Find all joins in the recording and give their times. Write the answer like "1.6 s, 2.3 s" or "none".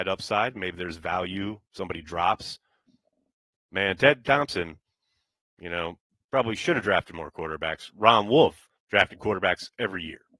none

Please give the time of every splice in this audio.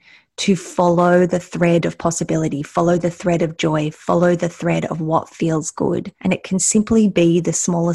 6.1 s

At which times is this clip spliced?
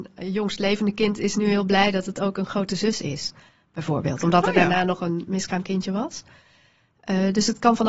none

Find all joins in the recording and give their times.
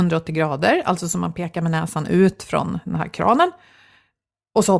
none

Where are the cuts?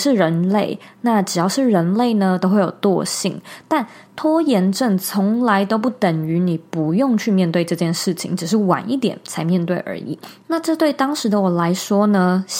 none

